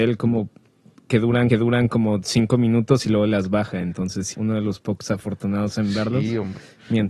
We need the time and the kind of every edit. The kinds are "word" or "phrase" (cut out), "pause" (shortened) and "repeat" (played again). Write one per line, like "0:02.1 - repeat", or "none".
0:01.5 - repeat
0:04.3 - word